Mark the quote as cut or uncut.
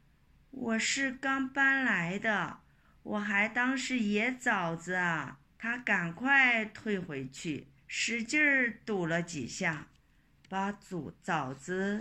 cut